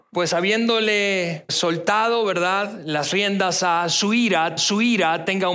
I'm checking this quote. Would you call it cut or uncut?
cut